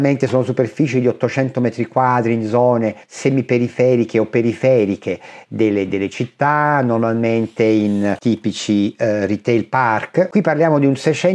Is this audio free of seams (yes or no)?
no